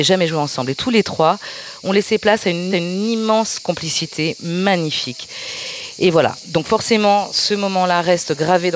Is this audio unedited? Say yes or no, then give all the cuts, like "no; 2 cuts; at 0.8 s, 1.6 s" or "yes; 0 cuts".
no; 1 cut; at 2.7 s